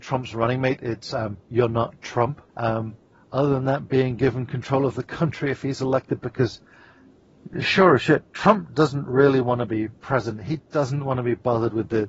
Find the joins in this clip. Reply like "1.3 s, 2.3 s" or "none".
2.5 s, 10.0 s